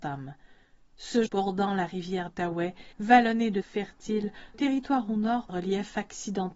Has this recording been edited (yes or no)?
yes